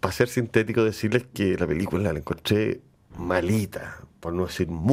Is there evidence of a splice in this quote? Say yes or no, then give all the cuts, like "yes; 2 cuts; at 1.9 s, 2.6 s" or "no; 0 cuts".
no; 0 cuts